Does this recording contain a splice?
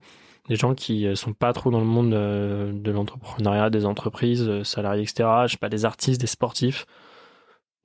no; 0 cuts

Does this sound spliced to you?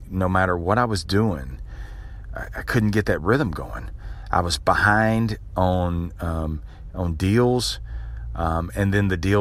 no; 0 cuts

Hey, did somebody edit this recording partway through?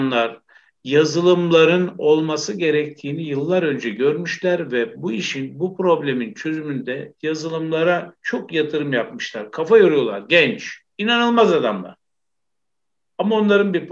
yes; 1 cut; at 8.2 s

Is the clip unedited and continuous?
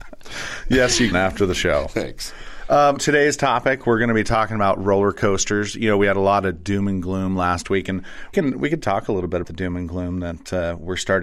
no; 4 cuts; at 1.1 s, 3.0 s, 8.3 s, 9.4 s

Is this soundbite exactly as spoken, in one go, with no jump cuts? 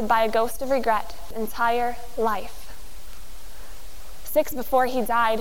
no; 2 cuts; at 1.3 s, 4.5 s

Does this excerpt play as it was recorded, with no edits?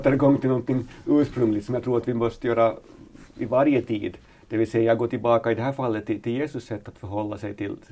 yes; 0 cuts

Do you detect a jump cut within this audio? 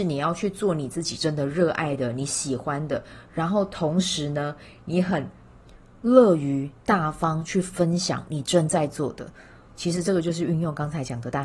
no; 0 cuts

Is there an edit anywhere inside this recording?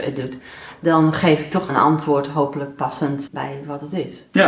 yes; 2 cuts; at 1.7 s, 3.3 s

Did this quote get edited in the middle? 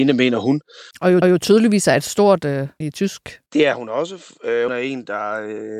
yes; 5 cuts; at 0.9 s, 1.2 s, 2.8 s, 3.5 s, 4.7 s

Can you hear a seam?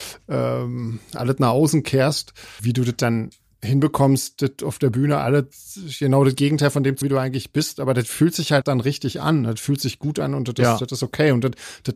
yes; 3 cuts; at 2.6 s, 7.0 s, 8.6 s

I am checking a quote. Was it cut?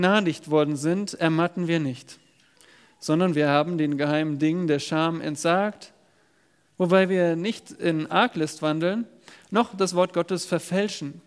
yes; 1 cut; at 2.5 s

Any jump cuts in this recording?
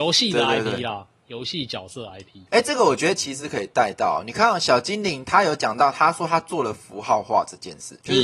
no; 0 cuts

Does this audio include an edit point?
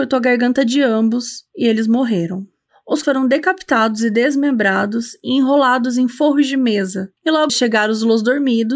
yes; 3 cuts; at 3.0 s, 7.2 s, 7.5 s

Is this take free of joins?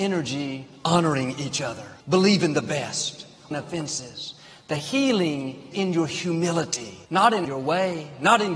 no; 5 cuts; at 2.0 s, 3.5 s, 5.7 s, 7.0 s, 7.4 s

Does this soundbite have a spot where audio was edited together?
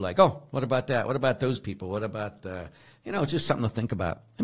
no; 0 cuts

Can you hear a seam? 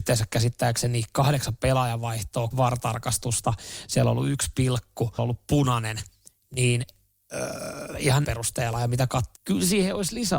yes; 4 cuts; at 2.5 s, 5.2 s, 8.2 s, 9.4 s

